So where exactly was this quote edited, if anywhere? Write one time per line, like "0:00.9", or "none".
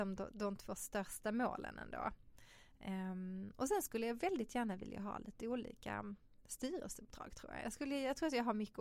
none